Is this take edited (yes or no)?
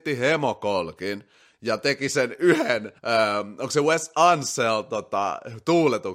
yes